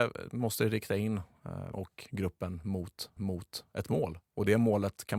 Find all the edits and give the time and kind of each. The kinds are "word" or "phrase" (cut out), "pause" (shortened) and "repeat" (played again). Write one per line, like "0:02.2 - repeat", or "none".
0:01.7 - word
0:03.2 - repeat